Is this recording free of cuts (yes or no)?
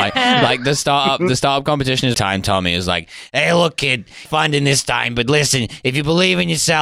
no